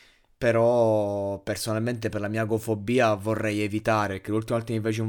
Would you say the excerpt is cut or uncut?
uncut